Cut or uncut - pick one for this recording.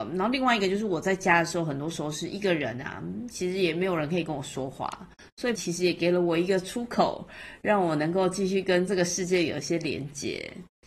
cut